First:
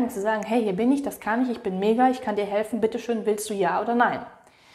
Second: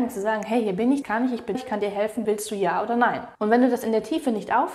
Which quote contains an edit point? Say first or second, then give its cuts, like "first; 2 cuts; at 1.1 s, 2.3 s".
second; 4 cuts; at 1.0 s, 1.5 s, 2.2 s, 3.3 s